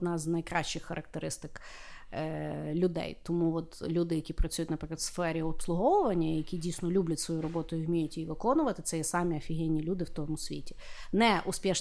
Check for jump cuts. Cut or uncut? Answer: uncut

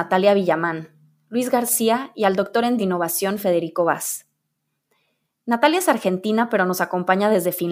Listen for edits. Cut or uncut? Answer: cut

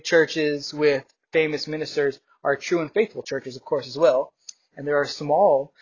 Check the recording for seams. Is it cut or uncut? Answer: uncut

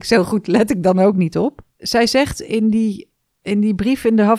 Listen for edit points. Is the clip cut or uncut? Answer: uncut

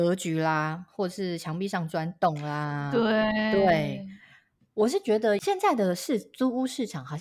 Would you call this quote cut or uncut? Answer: uncut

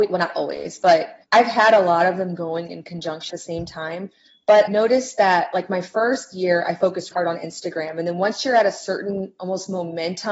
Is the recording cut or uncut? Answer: cut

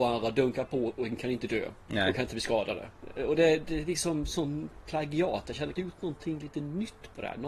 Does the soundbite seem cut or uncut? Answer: cut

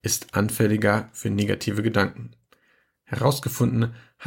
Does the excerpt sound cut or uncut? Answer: uncut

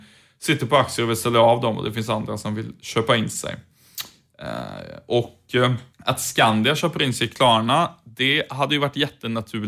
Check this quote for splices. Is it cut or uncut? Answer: cut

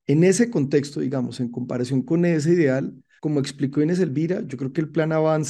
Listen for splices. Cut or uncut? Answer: uncut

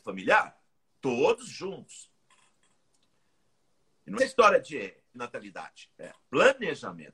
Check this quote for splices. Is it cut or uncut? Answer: cut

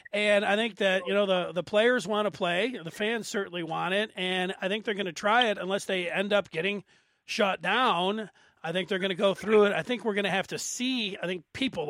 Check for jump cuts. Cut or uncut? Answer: uncut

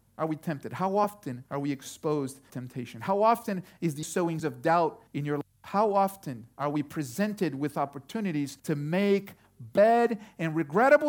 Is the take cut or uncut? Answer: cut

